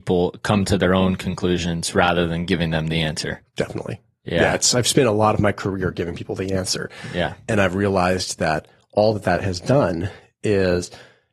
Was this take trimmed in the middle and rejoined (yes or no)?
no